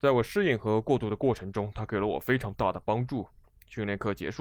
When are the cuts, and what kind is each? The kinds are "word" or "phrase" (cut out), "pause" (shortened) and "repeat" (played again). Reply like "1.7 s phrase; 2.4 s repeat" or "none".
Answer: none